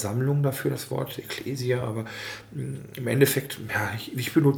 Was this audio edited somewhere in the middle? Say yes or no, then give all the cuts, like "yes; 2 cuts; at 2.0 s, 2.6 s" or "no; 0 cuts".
no; 0 cuts